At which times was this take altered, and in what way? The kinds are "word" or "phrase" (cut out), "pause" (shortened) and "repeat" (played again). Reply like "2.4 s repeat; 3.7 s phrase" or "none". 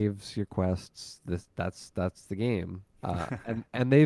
2.9 s pause